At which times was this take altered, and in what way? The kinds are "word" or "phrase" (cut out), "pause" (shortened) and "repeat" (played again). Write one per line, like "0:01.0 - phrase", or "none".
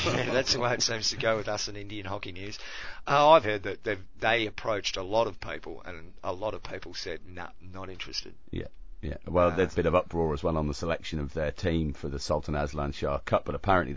0:03.4 - word
0:09.7 - phrase